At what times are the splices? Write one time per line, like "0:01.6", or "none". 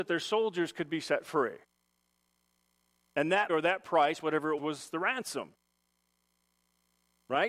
0:03.5
0:04.6